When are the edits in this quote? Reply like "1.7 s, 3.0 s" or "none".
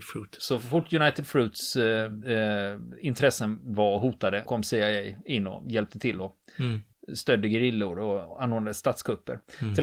4.5 s